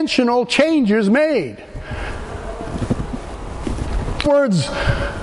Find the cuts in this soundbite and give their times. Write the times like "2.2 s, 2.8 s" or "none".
4.2 s